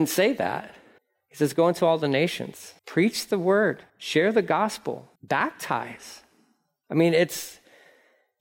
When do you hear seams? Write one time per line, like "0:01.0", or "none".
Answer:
0:01.0
0:02.8
0:03.9
0:05.2